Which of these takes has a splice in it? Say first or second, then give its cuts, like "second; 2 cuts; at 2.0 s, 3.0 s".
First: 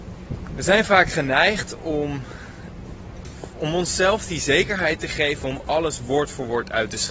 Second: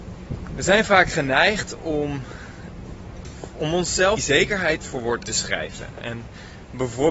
second; 3 cuts; at 4.2 s, 4.8 s, 5.2 s